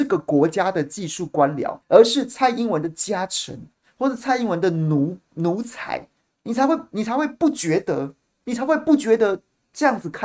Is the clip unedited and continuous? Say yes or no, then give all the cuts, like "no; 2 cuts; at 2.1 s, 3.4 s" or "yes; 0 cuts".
no; 1 cut; at 1.8 s